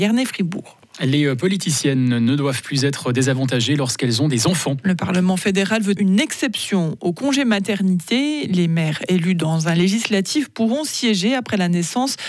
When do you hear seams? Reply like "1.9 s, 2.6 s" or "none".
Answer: 6.0 s

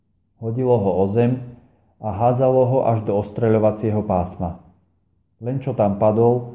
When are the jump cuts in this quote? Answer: none

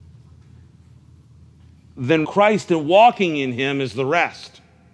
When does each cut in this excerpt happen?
2.2 s

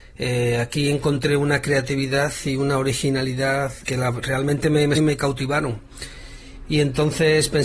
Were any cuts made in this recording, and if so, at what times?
3.8 s, 4.9 s

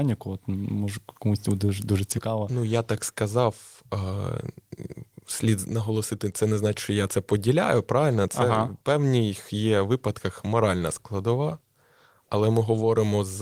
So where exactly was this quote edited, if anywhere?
none

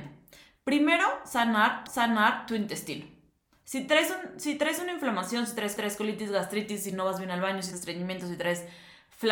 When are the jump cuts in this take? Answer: 1.9 s, 5.8 s, 7.7 s

